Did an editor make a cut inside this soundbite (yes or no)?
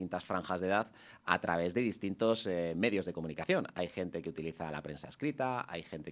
no